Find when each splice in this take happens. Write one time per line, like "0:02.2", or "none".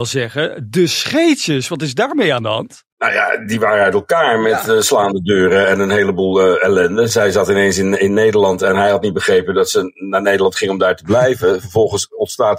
0:02.9